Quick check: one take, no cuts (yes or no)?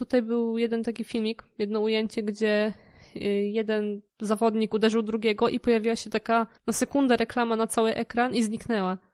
no